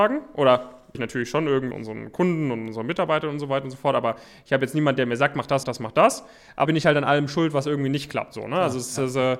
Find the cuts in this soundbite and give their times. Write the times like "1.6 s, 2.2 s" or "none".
0.9 s, 1.7 s, 5.6 s, 6.6 s